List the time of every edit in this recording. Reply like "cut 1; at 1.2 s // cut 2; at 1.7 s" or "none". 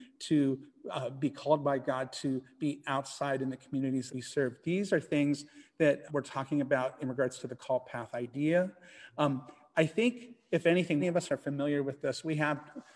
cut 1; at 4.1 s // cut 2; at 6.1 s // cut 3; at 11.0 s